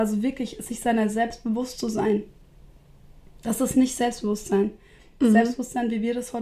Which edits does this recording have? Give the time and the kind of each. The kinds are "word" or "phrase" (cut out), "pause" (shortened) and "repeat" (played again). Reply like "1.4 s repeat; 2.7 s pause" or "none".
none